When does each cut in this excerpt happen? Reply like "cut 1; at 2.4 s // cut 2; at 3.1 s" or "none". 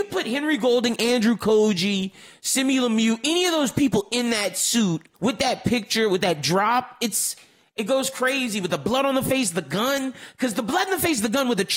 cut 1; at 5.1 s